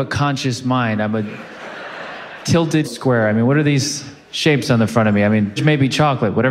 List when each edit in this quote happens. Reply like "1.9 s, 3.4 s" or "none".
2.8 s, 5.6 s